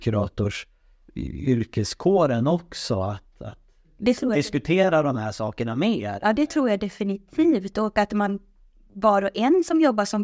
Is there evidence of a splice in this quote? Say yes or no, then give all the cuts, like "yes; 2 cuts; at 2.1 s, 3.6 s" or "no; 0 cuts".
no; 0 cuts